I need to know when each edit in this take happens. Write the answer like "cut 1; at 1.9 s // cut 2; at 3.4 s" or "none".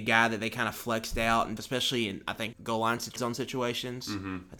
cut 1; at 1.6 s // cut 2; at 2.5 s // cut 3; at 3.2 s